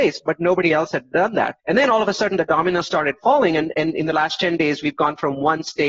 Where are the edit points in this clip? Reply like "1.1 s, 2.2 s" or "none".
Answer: 1.6 s